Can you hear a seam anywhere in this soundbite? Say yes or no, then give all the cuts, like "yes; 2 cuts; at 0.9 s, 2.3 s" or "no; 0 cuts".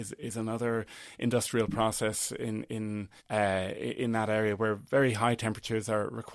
yes; 1 cut; at 3.2 s